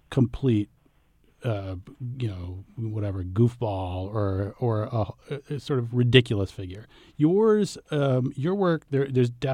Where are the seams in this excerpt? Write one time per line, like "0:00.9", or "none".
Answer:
none